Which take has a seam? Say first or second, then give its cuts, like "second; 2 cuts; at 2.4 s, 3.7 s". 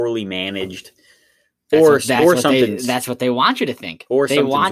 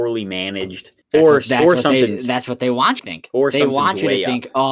second; 2 cuts; at 1.0 s, 3.0 s